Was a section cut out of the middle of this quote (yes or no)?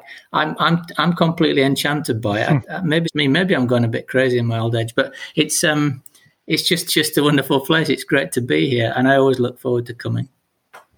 yes